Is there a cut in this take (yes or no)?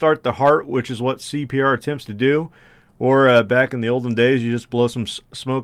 no